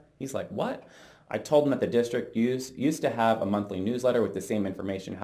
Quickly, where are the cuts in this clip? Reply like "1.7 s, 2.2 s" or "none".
none

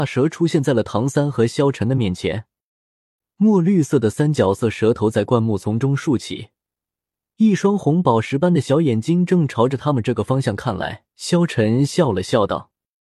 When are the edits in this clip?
11.1 s

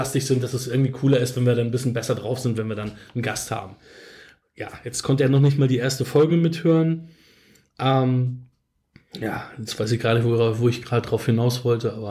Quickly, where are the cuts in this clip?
none

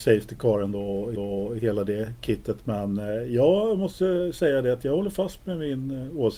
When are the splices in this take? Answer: 1.2 s

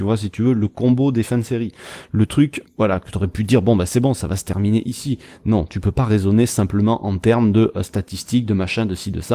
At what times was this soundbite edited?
2.6 s

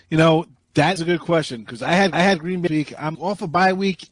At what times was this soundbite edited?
1.0 s, 2.1 s, 2.7 s, 3.1 s

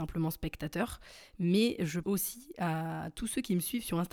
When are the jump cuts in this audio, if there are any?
2.0 s

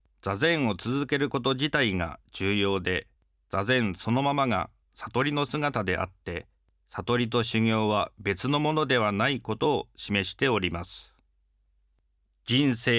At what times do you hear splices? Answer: none

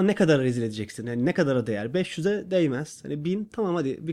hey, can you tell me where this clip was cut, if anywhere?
none

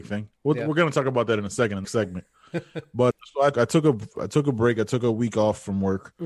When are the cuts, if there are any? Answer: 1.8 s, 3.1 s, 3.5 s

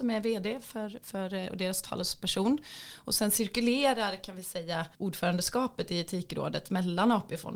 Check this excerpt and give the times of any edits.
4.9 s

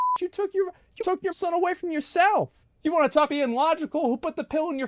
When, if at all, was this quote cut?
1.0 s, 1.3 s, 2.6 s, 3.3 s

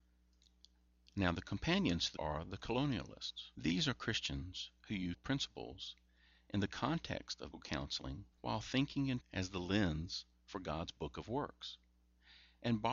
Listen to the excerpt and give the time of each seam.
2.2 s, 3.5 s, 5.1 s, 7.5 s, 8.3 s, 9.2 s

